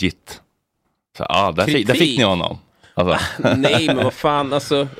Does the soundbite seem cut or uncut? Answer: uncut